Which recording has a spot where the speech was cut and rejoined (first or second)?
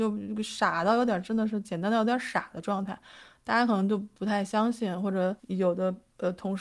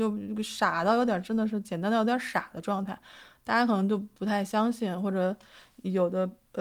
first